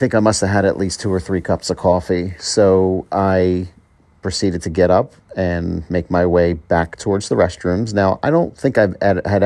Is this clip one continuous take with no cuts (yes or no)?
yes